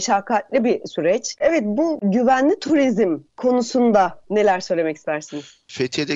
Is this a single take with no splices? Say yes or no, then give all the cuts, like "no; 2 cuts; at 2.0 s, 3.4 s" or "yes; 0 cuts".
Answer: no; 1 cut; at 4.2 s